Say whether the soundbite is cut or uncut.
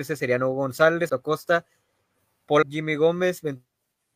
cut